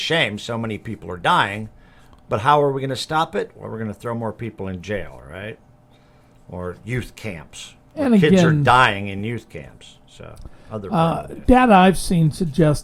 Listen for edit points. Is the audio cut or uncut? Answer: uncut